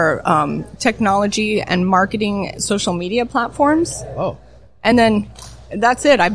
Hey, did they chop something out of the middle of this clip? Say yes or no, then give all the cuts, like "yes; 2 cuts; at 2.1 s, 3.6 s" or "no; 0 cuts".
no; 0 cuts